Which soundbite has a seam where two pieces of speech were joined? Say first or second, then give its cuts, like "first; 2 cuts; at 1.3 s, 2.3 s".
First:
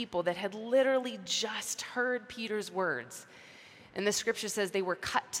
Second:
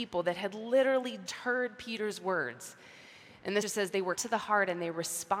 second; 3 cuts; at 1.3 s, 3.6 s, 4.1 s